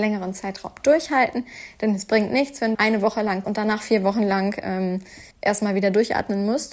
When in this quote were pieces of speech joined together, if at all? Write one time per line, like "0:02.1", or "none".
0:02.7
0:03.4
0:05.3